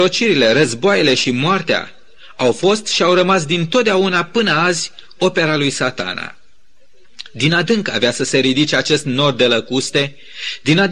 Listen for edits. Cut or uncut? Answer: uncut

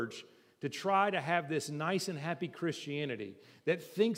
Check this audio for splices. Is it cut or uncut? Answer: uncut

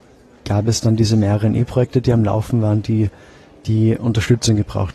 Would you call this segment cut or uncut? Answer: uncut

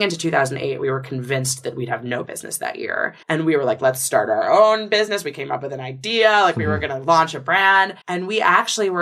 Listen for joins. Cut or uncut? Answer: cut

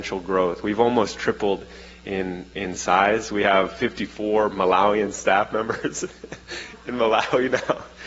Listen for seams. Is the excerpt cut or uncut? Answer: uncut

